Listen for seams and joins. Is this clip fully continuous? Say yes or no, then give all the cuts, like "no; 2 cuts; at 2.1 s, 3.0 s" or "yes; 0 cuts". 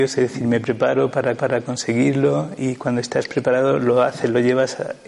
no; 1 cut; at 1.4 s